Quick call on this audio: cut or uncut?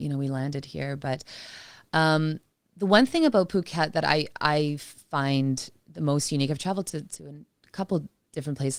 uncut